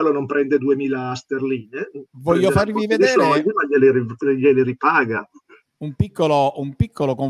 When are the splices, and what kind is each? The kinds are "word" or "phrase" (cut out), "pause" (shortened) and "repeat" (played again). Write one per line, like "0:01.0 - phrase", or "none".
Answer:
none